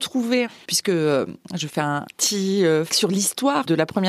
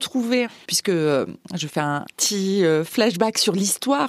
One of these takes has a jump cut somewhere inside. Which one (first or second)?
first